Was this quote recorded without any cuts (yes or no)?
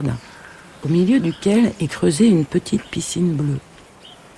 yes